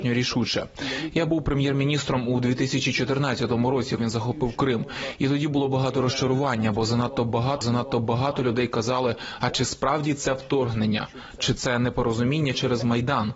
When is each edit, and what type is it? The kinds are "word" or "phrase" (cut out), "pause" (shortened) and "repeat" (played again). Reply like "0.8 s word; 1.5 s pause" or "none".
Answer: 4.0 s word; 7.6 s repeat